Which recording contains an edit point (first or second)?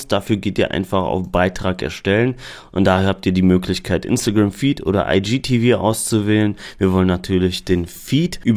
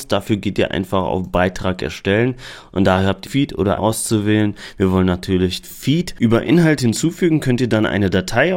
second